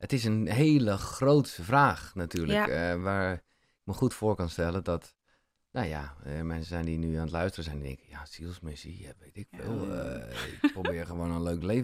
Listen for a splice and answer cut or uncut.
uncut